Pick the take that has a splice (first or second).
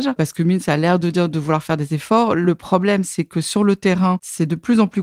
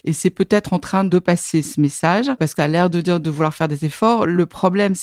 second